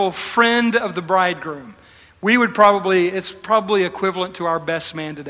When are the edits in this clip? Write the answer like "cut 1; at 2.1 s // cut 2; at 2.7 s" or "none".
none